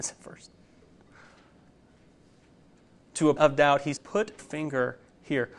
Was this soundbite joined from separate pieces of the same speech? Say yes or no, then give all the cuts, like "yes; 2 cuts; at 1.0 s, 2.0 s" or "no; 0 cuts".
yes; 3 cuts; at 3.4 s, 4.0 s, 4.4 s